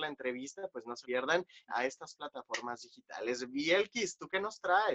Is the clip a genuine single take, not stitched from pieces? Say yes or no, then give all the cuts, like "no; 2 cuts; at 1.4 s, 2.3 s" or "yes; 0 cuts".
no; 2 cuts; at 1.0 s, 1.7 s